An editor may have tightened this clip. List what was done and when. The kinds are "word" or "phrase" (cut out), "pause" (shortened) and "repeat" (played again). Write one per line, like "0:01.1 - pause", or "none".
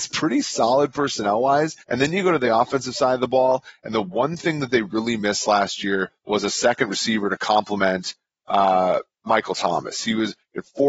0:01.8 - pause
0:06.2 - pause